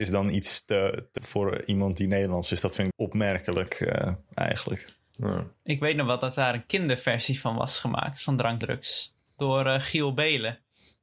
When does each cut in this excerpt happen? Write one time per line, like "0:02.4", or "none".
0:01.2
0:02.9
0:08.6